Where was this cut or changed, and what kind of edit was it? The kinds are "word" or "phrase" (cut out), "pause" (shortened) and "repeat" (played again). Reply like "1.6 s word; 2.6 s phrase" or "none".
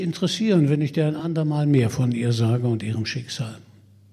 none